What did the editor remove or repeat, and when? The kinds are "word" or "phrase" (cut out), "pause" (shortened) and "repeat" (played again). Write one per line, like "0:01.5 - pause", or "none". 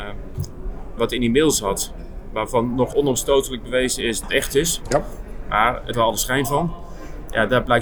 0:01.0 - word
0:02.9 - word
0:04.2 - word
0:05.9 - word

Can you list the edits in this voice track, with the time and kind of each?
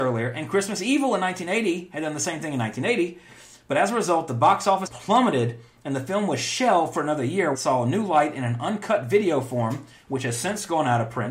0:04.9 - word
0:07.5 - word

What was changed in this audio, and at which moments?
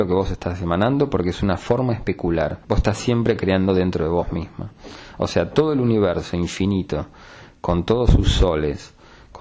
0:02.6 - pause

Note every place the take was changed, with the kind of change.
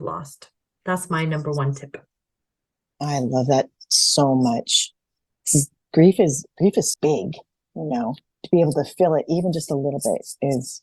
0:06.9 - word
0:08.3 - word

